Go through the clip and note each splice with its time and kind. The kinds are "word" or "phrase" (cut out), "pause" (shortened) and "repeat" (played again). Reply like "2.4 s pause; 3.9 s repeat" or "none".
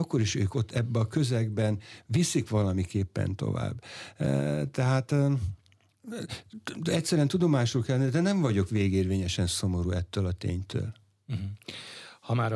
none